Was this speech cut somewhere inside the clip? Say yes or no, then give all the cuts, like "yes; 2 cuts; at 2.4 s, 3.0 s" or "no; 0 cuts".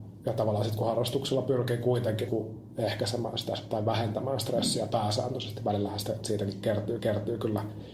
yes; 2 cuts; at 2.3 s, 7.0 s